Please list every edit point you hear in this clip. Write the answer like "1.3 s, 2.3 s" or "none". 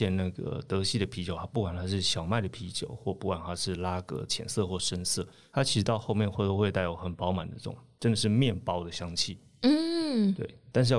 none